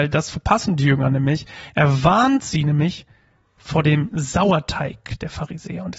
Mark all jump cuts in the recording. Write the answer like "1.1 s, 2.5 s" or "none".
none